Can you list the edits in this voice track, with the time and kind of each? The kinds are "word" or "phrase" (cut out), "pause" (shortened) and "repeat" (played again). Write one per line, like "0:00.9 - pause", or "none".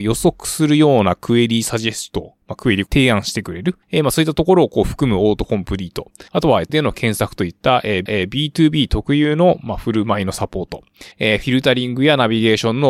0:03.8 - pause
0:06.3 - pause
0:06.7 - word
0:08.1 - repeat
0:11.1 - pause